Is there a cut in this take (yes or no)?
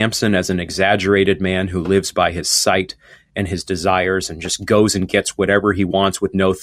no